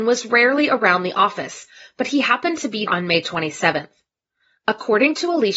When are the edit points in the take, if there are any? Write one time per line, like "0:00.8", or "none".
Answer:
0:02.9